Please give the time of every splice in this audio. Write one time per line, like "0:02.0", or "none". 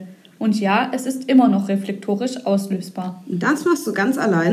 none